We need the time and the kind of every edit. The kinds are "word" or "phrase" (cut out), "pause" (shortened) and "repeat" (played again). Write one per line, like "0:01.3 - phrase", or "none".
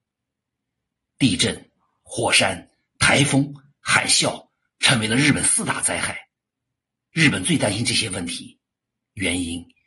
none